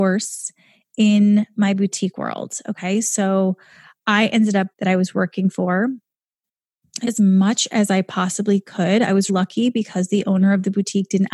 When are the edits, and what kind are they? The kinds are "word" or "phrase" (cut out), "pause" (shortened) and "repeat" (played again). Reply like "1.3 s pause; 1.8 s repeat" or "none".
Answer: 4.7 s phrase; 7.0 s word; 9.3 s word